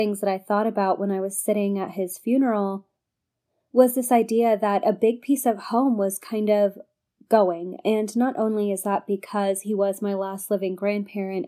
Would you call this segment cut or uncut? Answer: uncut